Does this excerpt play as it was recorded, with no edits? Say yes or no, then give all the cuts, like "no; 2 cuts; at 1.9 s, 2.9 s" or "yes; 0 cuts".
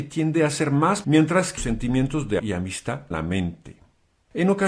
no; 4 cuts; at 1.0 s, 1.6 s, 2.4 s, 3.1 s